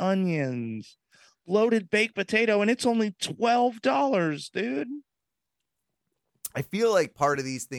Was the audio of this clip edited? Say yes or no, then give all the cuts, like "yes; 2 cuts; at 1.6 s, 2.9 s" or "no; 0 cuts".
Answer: no; 0 cuts